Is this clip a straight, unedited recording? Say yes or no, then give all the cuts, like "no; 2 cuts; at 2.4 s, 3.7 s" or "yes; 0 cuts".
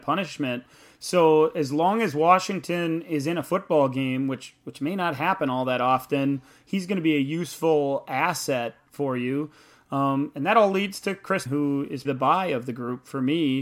no; 2 cuts; at 11.5 s, 12.0 s